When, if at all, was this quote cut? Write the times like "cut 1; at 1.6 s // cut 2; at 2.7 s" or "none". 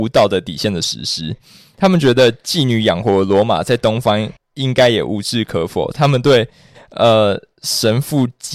cut 1; at 4.4 s